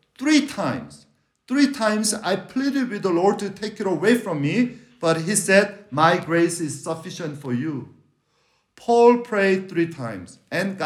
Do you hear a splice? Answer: no; 0 cuts

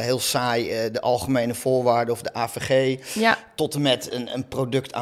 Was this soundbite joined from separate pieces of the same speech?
no; 0 cuts

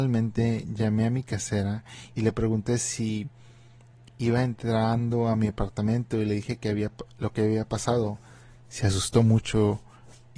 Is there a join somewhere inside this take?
no; 0 cuts

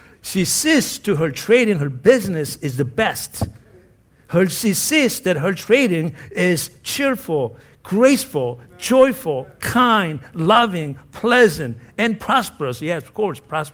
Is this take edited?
no; 0 cuts

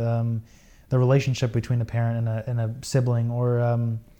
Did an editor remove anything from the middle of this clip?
no; 0 cuts

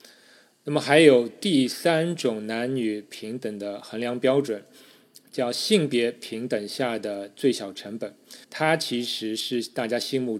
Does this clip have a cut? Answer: yes; 1 cut; at 8.4 s

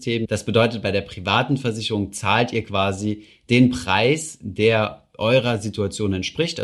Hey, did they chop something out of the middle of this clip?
no; 0 cuts

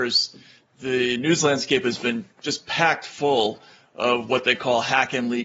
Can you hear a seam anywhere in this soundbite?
no; 0 cuts

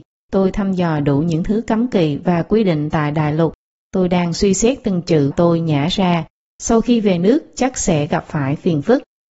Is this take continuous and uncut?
no; 1 cut; at 5.3 s

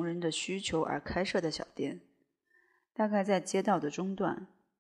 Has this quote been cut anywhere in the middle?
no; 0 cuts

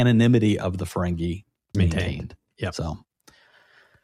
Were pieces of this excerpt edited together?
yes; 1 cut; at 1.7 s

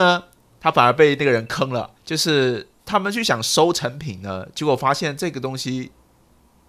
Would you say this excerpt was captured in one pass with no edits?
no; 2 cuts; at 2.0 s, 2.8 s

